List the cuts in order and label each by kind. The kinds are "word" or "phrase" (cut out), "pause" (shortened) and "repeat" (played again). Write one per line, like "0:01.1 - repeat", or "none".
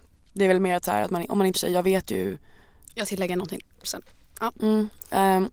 0:01.5 - word
0:03.0 - word
0:03.8 - word

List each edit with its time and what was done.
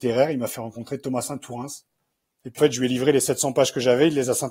0:02.6 - phrase

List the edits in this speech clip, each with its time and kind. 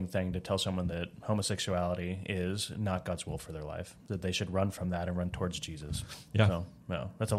none

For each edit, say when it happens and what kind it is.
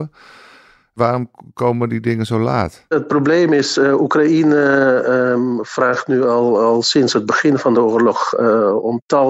none

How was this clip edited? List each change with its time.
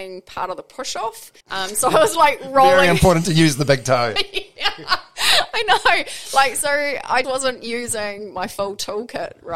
0:01.4 - pause
0:07.2 - word

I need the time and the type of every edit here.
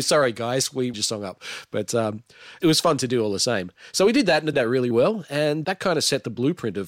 0:00.9 - phrase
0:04.5 - word
0:04.9 - word
0:05.6 - word

